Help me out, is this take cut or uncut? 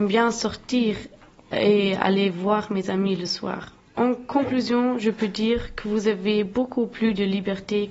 uncut